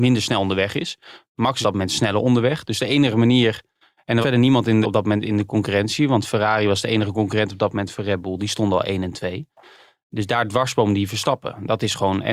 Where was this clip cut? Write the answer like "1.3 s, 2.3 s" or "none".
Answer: 1.6 s, 4.2 s, 4.8 s